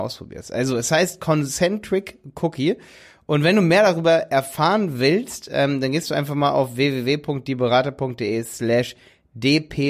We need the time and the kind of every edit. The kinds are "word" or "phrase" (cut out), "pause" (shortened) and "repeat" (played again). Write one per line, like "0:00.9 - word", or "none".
none